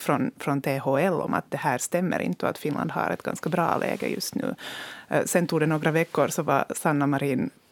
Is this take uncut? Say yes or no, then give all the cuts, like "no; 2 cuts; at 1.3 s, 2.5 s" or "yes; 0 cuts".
yes; 0 cuts